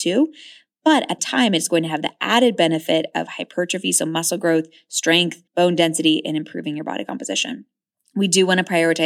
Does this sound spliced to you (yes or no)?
yes